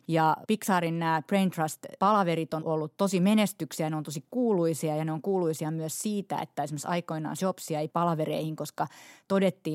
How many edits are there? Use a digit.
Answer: 3